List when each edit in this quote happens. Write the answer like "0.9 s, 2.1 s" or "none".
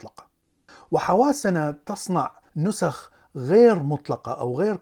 2.5 s